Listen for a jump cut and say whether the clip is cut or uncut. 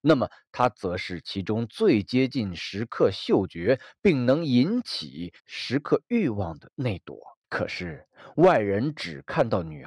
cut